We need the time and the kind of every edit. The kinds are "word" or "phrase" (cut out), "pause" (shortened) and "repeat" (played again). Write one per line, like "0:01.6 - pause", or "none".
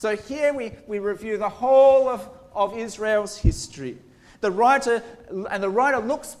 none